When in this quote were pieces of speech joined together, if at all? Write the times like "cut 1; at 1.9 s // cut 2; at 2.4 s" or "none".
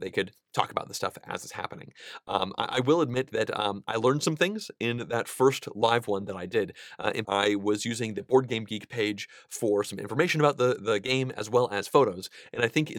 cut 1; at 7.2 s